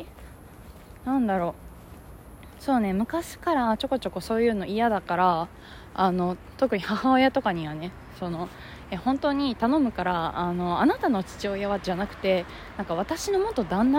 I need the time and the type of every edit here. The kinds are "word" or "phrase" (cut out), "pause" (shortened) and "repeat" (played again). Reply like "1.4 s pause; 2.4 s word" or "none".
none